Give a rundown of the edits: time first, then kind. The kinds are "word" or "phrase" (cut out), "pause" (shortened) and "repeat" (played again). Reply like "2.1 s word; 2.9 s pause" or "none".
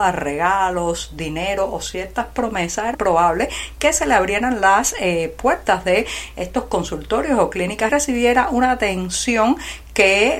2.9 s word; 7.9 s phrase